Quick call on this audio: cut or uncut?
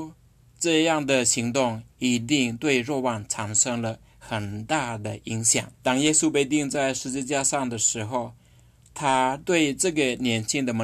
cut